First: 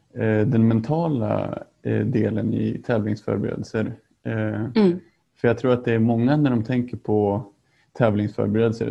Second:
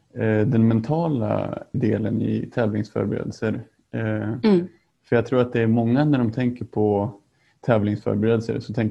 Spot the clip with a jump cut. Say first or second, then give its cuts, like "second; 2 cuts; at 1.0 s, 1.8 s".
second; 1 cut; at 1.7 s